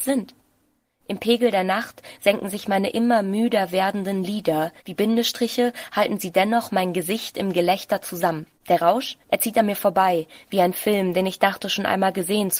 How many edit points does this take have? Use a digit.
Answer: 3